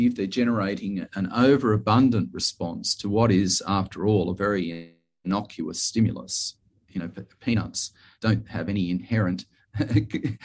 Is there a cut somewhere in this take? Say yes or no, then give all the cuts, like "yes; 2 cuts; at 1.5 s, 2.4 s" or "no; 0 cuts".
no; 0 cuts